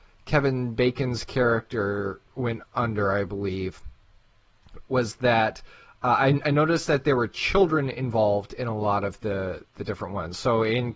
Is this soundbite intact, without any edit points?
yes; 0 cuts

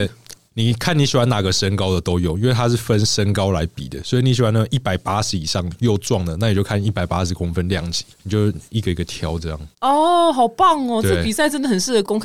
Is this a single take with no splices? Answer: no; 2 cuts; at 8.1 s, 9.7 s

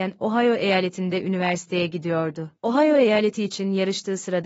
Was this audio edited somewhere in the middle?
yes; 1 cut; at 2.6 s

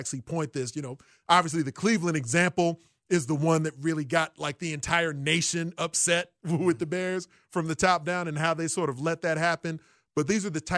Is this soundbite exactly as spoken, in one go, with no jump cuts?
yes; 0 cuts

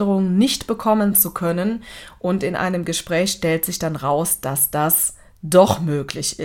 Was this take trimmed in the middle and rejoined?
no; 0 cuts

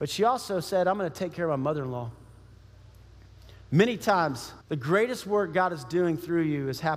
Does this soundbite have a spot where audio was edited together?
yes; 1 cut; at 4.6 s

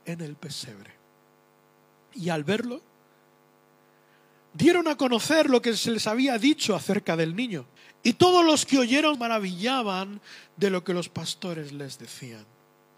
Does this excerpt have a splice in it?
yes; 2 cuts; at 7.8 s, 9.1 s

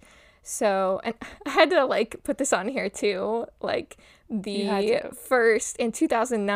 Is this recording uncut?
yes; 0 cuts

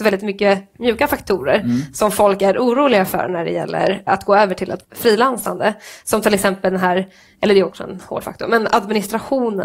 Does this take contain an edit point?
yes; 3 cuts; at 4.1 s, 4.8 s, 7.7 s

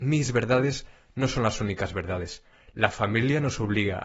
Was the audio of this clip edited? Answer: no; 0 cuts

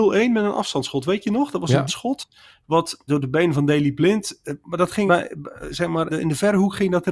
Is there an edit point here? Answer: yes; 4 cuts; at 1.9 s, 3.1 s, 5.1 s, 6.1 s

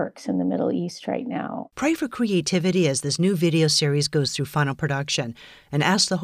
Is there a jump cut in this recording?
no; 0 cuts

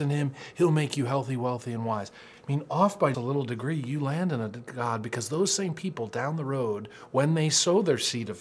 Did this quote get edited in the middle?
yes; 1 cut; at 3.1 s

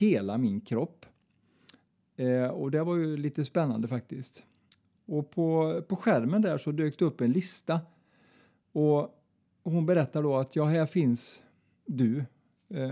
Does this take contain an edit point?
no; 0 cuts

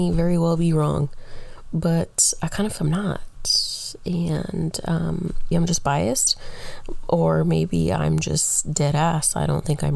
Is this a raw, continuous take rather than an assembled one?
no; 2 cuts; at 2.8 s, 5.5 s

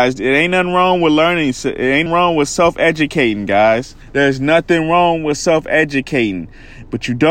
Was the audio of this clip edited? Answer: yes; 2 cuts; at 2.1 s, 4.0 s

